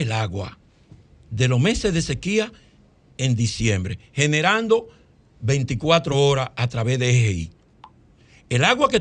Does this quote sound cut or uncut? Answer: uncut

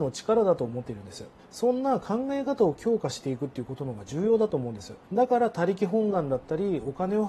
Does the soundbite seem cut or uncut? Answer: cut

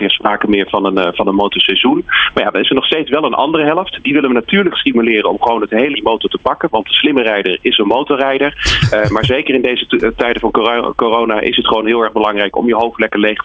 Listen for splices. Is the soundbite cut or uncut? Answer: cut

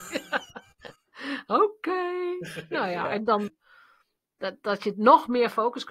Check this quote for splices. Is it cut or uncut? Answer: cut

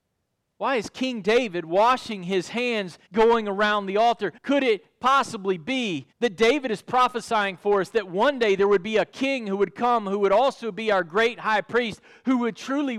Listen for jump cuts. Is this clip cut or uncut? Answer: cut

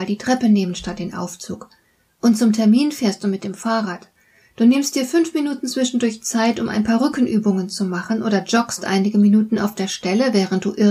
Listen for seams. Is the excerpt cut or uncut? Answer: uncut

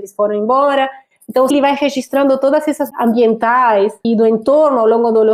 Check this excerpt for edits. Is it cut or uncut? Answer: cut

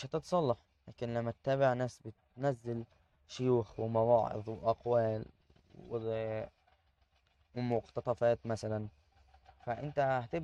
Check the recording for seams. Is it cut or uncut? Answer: uncut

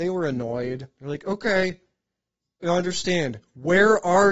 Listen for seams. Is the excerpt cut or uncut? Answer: uncut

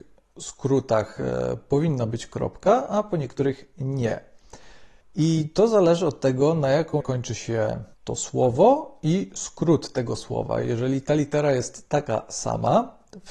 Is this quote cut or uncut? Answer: cut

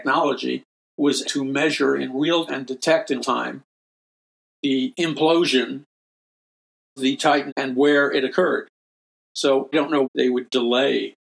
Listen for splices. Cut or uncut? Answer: cut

